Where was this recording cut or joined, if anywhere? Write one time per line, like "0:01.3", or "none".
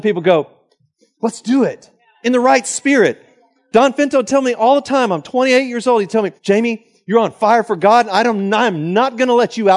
0:02.1
0:06.4